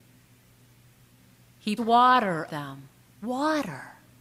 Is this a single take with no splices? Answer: no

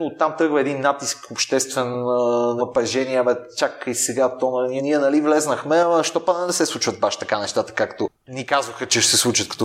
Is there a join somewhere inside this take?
yes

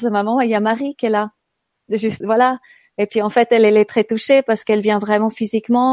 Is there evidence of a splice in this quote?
yes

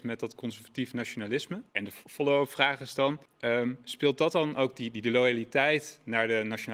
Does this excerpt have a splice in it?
yes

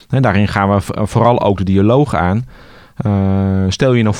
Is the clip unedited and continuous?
yes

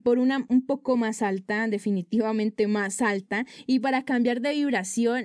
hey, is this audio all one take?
yes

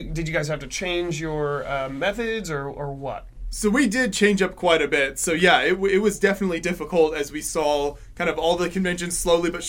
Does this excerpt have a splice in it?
no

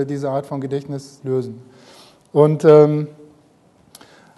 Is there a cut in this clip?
yes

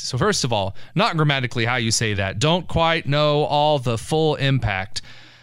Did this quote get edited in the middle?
no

